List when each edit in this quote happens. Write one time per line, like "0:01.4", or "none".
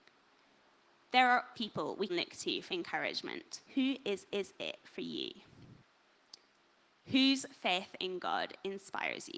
0:01.5
0:02.1
0:02.7
0:03.7
0:04.3